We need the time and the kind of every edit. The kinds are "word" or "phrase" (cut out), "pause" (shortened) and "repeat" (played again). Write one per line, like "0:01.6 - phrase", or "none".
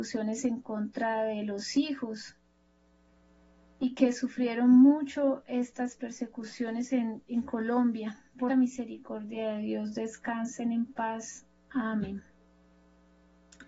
0:08.5 - phrase